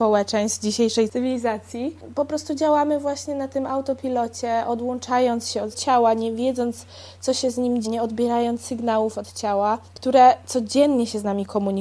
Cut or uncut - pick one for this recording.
cut